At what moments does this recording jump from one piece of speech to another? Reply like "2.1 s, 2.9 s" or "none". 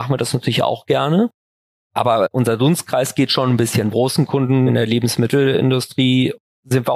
3.9 s